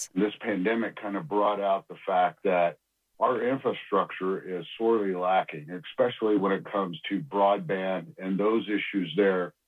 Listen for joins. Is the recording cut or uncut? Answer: uncut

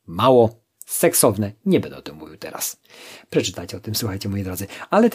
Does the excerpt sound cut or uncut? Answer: uncut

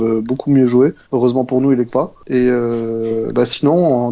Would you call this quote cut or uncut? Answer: cut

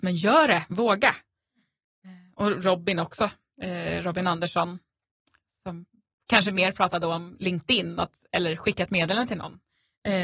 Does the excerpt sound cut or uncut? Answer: uncut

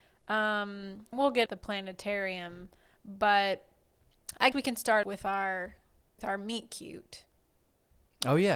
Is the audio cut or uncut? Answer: cut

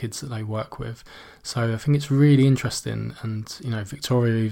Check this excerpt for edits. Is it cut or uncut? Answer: uncut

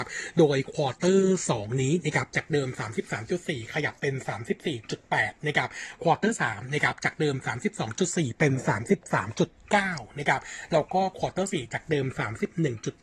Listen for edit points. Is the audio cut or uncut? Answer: uncut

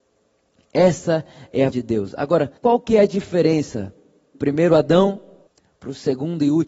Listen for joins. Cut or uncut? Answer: cut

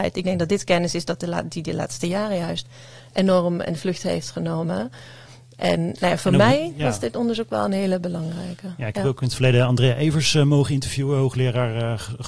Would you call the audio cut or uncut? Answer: uncut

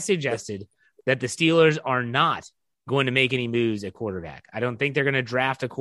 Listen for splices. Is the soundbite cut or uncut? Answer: uncut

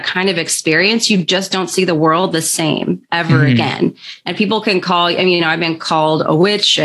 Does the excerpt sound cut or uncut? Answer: uncut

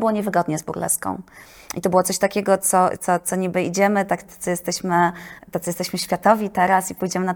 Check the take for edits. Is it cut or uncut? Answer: cut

